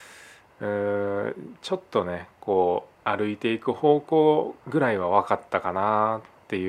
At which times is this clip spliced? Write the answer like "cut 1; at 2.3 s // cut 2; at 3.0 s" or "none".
cut 1; at 2.9 s // cut 2; at 4.6 s